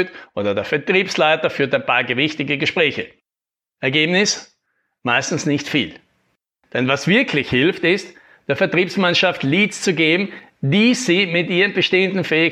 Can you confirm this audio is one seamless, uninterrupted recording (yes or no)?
yes